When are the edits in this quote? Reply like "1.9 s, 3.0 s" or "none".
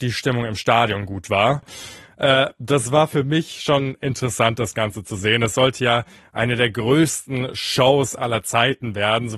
none